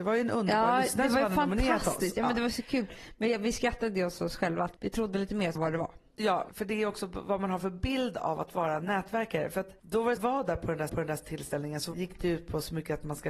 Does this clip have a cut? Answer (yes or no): yes